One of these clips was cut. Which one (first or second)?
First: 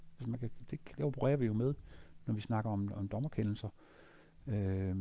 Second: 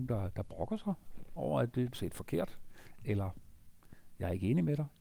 second